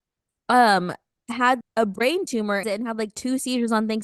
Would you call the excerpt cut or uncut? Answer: cut